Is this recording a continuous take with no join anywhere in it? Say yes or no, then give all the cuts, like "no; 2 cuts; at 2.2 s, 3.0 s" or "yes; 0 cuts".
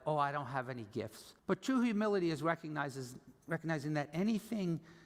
no; 1 cut; at 1.4 s